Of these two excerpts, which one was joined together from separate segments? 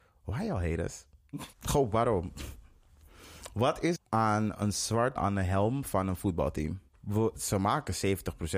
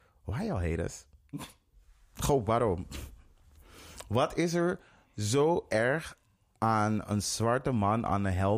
first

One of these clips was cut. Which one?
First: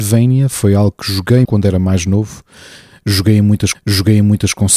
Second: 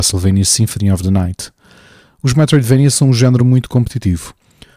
first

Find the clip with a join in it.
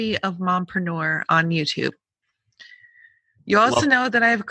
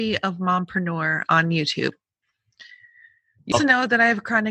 second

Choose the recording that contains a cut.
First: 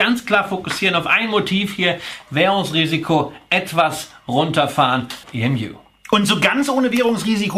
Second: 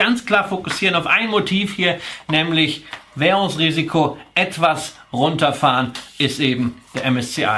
first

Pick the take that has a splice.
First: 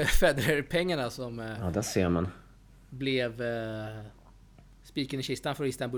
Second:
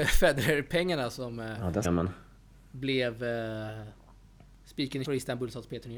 second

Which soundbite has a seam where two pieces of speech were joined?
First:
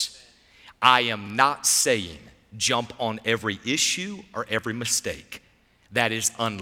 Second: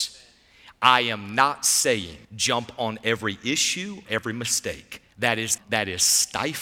second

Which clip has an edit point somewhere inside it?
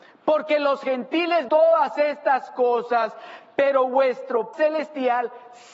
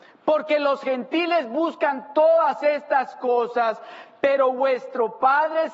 first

